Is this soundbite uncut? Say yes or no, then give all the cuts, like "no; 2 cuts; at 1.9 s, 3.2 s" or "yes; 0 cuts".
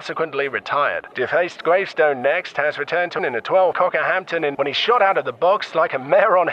no; 4 cuts; at 1.1 s, 3.2 s, 3.7 s, 4.5 s